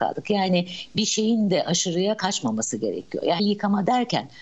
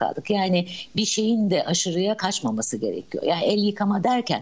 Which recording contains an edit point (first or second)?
first